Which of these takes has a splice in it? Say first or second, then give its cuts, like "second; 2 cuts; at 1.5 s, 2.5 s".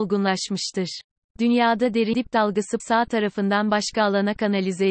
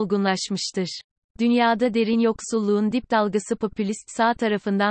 first; 2 cuts; at 2.1 s, 2.8 s